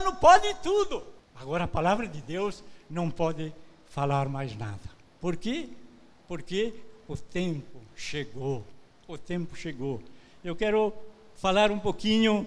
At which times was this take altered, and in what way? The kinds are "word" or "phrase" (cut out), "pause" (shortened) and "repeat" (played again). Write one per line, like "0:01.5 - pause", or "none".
none